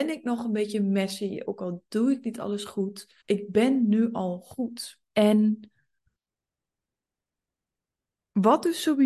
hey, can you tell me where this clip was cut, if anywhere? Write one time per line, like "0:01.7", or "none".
0:03.2
0:05.0